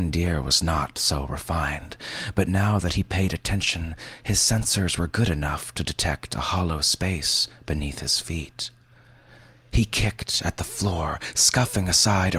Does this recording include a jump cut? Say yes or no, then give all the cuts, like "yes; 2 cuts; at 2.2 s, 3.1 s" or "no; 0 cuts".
no; 0 cuts